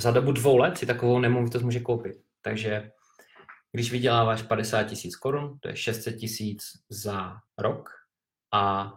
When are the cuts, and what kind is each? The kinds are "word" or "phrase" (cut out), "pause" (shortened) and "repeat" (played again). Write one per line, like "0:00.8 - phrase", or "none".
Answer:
0:07.5 - pause